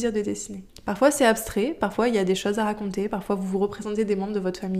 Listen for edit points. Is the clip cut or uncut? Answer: uncut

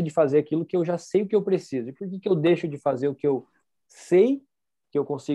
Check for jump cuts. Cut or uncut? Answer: uncut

